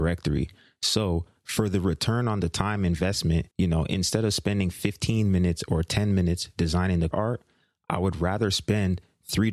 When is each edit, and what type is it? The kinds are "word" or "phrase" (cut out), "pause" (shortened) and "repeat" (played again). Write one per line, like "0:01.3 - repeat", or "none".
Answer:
0:03.5 - pause
0:07.1 - word

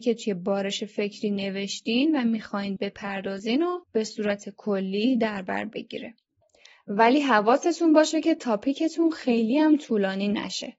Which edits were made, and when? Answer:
0:02.8 - word
0:03.8 - pause

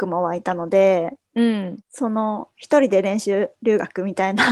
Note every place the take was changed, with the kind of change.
0:01.8 - pause

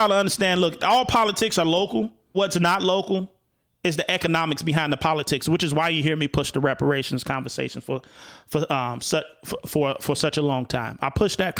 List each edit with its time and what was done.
0:02.3 - word

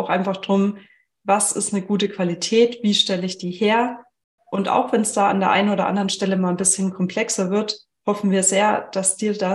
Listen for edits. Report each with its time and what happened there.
none

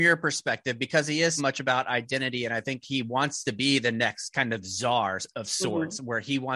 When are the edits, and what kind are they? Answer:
0:01.4 - word

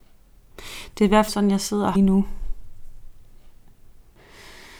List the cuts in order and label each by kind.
0:01.3 - word
0:01.9 - phrase

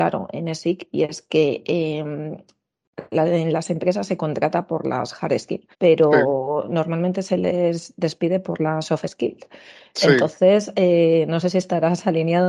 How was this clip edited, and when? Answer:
0:05.7 - pause

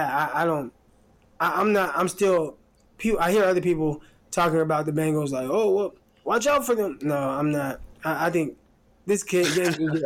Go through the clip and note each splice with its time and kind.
none

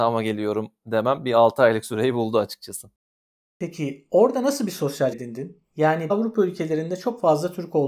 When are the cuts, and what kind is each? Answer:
0:05.1 - word
0:06.1 - word

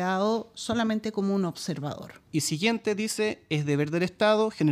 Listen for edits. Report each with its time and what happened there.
0:02.3 - pause

